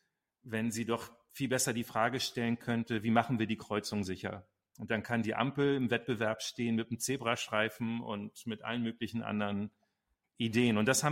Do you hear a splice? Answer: no; 0 cuts

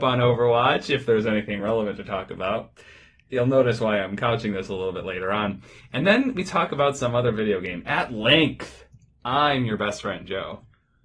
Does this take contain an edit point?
no; 0 cuts

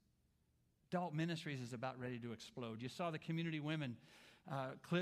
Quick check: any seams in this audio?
no; 0 cuts

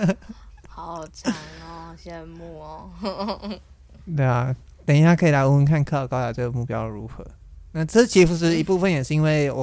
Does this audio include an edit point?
yes; 1 cut; at 4.8 s

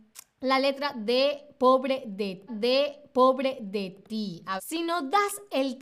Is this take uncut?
no; 2 cuts; at 2.5 s, 4.6 s

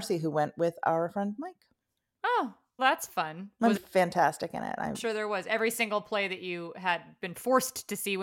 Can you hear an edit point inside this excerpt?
yes; 3 cuts; at 2.8 s, 3.8 s, 4.9 s

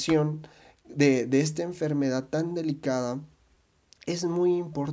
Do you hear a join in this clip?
no; 0 cuts

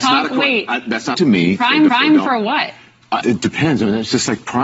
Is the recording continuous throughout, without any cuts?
no; 3 cuts; at 1.1 s, 1.9 s, 3.2 s

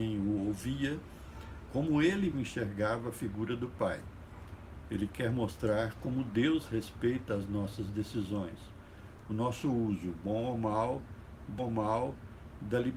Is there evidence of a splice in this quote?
yes; 2 cuts; at 2.3 s, 11.6 s

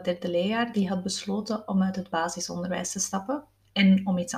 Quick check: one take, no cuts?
yes; 0 cuts

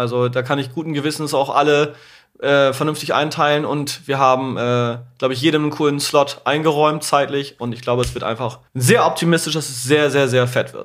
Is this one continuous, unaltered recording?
no; 1 cut; at 8.7 s

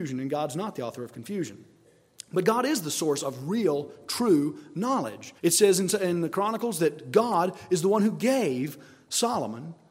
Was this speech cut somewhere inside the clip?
yes; 1 cut; at 5.4 s

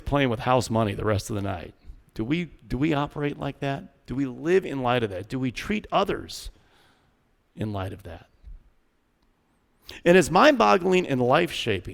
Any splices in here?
no; 0 cuts

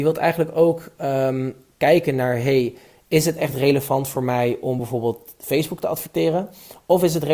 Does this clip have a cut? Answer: no; 0 cuts

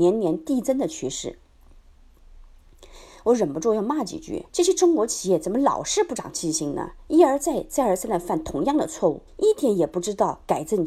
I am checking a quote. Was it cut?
yes; 2 cuts; at 4.5 s, 9.3 s

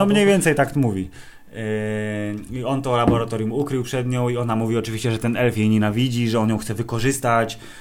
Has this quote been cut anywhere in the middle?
no; 0 cuts

